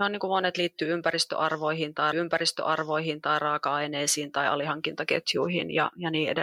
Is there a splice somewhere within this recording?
yes; 1 cut; at 2.1 s

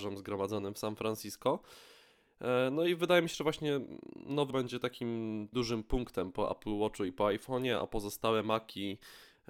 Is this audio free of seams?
no; 2 cuts; at 4.5 s, 5.5 s

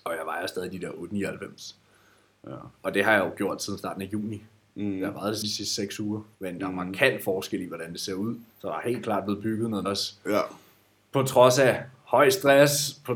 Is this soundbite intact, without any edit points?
no; 4 cuts; at 5.4 s, 6.3 s, 8.5 s, 9.9 s

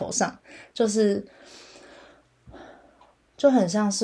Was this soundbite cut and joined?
no; 0 cuts

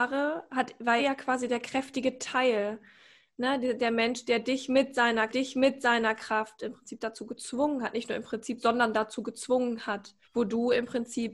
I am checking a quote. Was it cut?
yes; 3 cuts; at 1.0 s, 5.3 s, 10.2 s

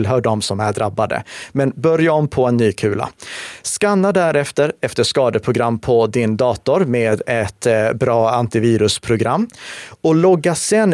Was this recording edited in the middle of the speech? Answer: no; 0 cuts

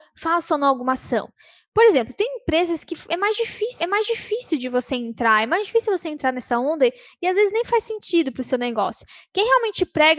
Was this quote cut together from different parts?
yes; 1 cut; at 3.8 s

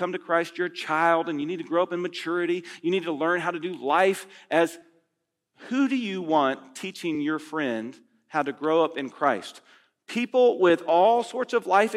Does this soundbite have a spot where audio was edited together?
no; 0 cuts

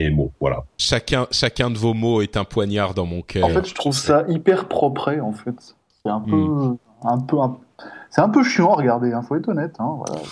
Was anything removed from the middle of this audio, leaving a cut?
no; 0 cuts

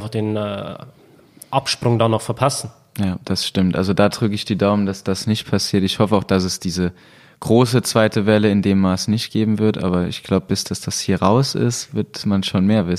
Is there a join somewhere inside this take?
no; 0 cuts

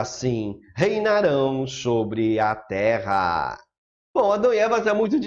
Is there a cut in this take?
no; 0 cuts

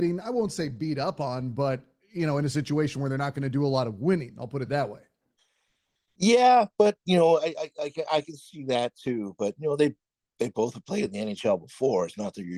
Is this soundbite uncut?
yes; 0 cuts

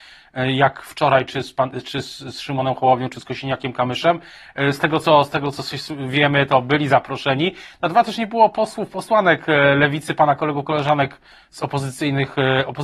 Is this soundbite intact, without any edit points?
yes; 0 cuts

